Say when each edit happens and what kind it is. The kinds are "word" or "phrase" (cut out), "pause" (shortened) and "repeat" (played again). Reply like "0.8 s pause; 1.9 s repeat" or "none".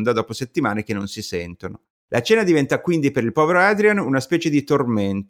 none